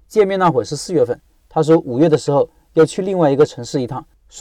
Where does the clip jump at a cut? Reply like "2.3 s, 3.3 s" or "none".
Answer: none